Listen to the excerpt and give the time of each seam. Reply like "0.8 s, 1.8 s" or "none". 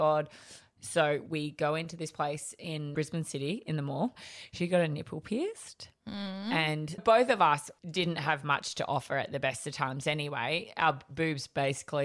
7.0 s, 7.8 s